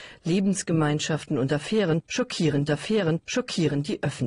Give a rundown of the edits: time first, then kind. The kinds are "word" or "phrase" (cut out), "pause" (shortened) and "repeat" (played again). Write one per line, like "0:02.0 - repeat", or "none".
0:02.7 - repeat